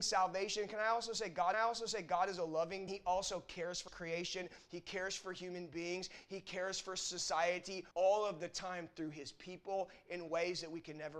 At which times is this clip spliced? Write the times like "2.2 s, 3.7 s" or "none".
1.5 s, 2.9 s, 3.9 s, 7.9 s